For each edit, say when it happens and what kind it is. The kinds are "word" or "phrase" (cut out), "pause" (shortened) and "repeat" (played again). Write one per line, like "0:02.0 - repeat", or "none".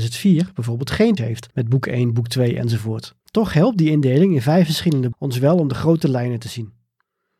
0:01.2 - word
0:01.5 - pause
0:03.2 - pause
0:05.1 - word